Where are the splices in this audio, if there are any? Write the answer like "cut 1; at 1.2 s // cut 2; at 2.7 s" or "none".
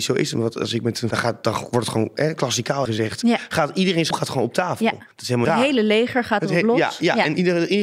cut 1; at 1.1 s // cut 2; at 2.9 s // cut 3; at 4.1 s // cut 4; at 5.1 s // cut 5; at 5.4 s